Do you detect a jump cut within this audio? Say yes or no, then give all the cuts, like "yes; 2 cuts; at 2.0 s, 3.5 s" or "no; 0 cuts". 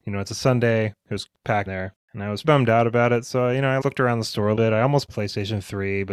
yes; 5 cuts; at 1.7 s, 2.4 s, 3.8 s, 4.6 s, 5.1 s